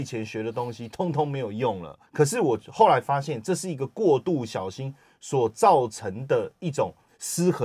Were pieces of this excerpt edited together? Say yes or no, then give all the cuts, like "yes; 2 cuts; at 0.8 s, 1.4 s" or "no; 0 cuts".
yes; 1 cut; at 2.1 s